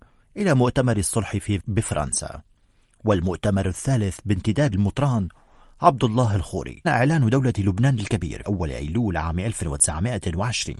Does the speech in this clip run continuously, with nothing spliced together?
no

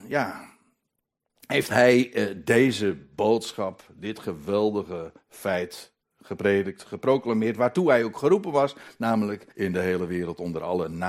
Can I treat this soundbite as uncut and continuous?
no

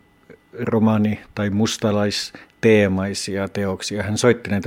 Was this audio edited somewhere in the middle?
no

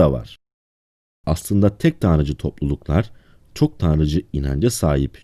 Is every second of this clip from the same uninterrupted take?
yes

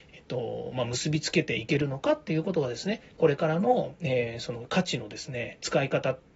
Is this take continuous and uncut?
yes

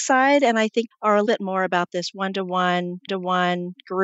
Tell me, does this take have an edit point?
yes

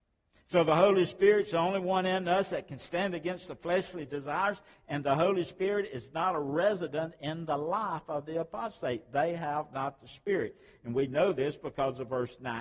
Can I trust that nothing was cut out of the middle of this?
yes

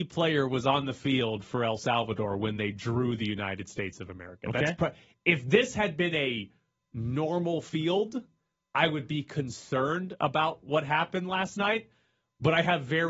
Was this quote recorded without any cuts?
yes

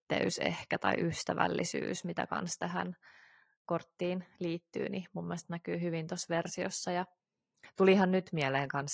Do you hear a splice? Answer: no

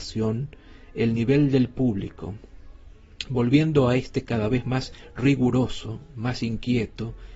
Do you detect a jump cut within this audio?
no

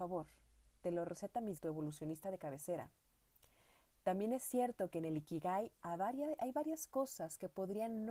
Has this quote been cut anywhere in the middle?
yes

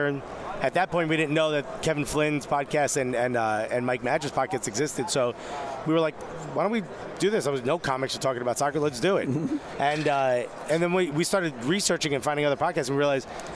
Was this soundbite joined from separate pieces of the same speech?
no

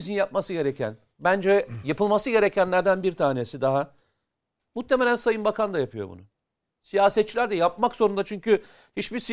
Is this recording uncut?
yes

